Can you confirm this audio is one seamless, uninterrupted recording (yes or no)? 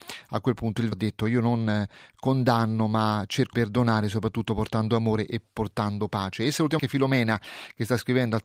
no